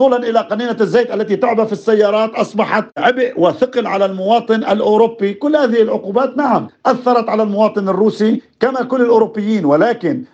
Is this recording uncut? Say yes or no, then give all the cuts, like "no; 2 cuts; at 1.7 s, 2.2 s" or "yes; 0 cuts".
yes; 0 cuts